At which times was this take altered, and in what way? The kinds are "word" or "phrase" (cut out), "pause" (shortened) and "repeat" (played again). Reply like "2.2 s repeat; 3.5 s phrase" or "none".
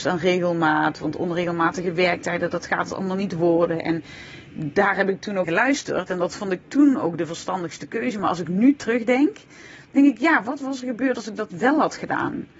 5.4 s word